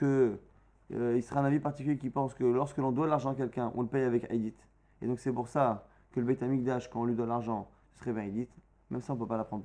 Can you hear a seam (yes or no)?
no